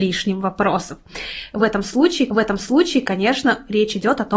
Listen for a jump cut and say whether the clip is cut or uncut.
cut